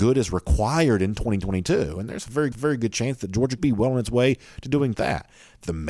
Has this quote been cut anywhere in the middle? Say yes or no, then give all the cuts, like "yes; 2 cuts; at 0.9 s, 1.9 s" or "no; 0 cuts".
yes; 3 cuts; at 2.5 s, 3.6 s, 4.9 s